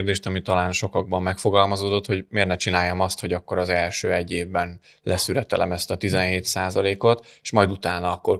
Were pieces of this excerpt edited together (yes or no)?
no